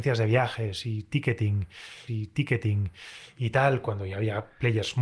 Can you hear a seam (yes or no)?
yes